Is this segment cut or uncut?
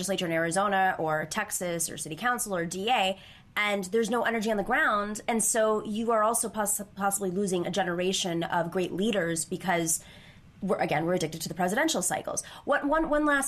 uncut